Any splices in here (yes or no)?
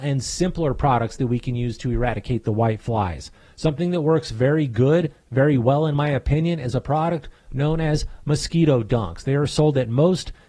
no